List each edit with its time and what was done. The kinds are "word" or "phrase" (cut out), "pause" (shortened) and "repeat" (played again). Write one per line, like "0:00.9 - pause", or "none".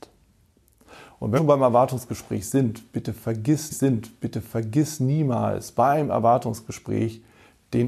0:01.4 - word
0:03.7 - repeat